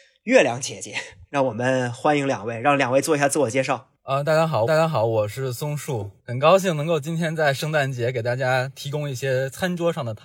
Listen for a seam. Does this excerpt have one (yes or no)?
yes